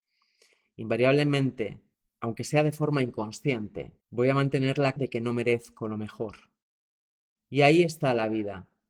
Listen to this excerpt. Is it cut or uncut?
cut